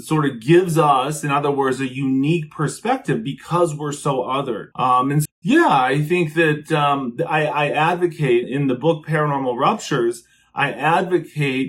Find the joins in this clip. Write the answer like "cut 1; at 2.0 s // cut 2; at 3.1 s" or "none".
cut 1; at 4.7 s // cut 2; at 5.3 s // cut 3; at 8.4 s